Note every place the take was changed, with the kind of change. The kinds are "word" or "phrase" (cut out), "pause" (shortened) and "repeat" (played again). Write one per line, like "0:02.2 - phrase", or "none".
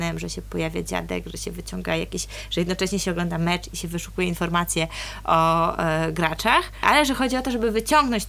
none